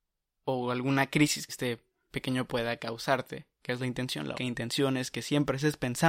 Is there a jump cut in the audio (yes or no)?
yes